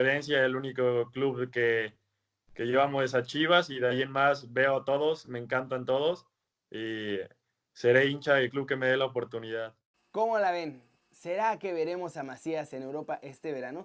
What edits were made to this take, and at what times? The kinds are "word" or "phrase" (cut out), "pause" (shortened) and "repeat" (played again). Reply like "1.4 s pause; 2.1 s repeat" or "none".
none